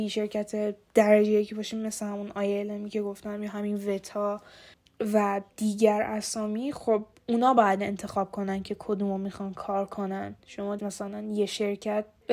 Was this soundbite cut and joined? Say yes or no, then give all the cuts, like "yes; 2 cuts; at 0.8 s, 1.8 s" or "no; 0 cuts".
yes; 2 cuts; at 4.7 s, 10.8 s